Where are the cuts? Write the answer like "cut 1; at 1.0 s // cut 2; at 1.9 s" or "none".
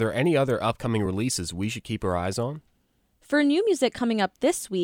none